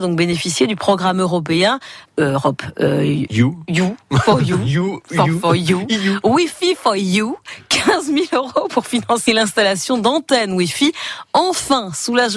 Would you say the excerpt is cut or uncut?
cut